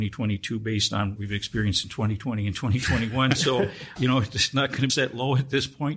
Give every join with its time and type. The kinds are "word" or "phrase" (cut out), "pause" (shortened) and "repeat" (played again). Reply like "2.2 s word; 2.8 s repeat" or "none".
1.2 s word; 4.0 s word; 4.9 s phrase